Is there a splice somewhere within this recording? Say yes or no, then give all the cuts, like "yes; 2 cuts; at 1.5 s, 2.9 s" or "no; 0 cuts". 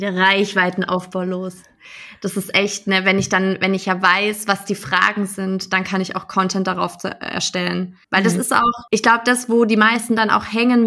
yes; 2 cuts; at 8.0 s, 8.9 s